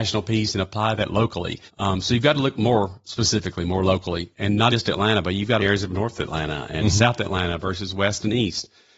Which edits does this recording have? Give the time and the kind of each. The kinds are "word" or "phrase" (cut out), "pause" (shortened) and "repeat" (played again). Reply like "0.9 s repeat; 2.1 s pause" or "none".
1.7 s pause; 4.7 s word; 5.6 s phrase